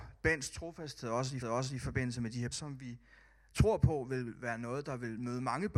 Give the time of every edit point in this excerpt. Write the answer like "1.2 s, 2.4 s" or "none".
1.4 s, 2.5 s